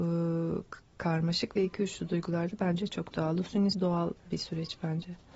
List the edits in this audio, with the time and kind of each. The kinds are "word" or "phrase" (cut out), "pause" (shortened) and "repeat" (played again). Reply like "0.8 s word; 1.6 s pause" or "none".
3.7 s word